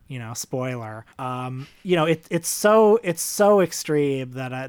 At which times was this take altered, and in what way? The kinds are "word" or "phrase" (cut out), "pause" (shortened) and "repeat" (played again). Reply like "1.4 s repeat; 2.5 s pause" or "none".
1.1 s pause